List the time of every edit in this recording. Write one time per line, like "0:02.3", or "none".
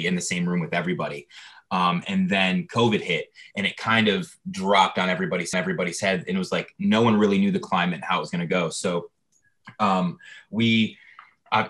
0:05.5